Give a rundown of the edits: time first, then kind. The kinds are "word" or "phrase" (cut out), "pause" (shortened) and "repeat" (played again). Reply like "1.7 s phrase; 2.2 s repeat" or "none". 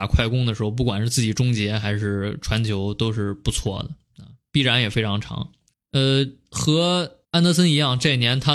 5.7 s pause; 7.2 s pause